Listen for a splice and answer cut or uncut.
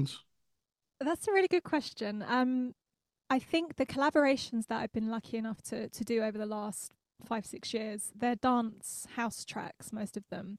uncut